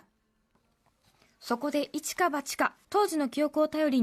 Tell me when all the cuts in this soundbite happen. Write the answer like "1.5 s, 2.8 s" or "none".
2.8 s